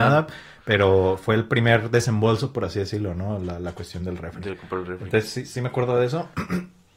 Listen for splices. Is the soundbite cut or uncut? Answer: uncut